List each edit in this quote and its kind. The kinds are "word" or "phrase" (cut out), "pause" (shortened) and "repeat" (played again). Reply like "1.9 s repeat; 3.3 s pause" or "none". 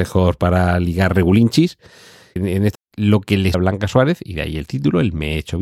2.4 s word; 2.7 s word; 3.5 s word